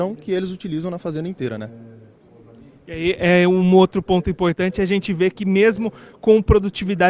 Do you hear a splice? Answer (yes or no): no